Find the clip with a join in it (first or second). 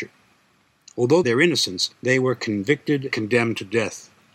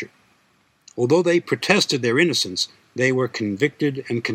first